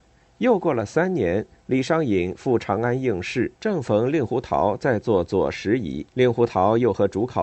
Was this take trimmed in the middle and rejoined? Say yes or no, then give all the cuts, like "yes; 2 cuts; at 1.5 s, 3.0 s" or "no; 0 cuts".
yes; 2 cuts; at 3.6 s, 6.1 s